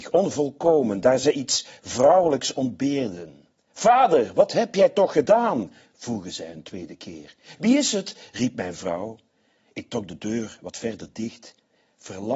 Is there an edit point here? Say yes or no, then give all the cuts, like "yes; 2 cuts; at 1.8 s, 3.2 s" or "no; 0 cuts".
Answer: no; 0 cuts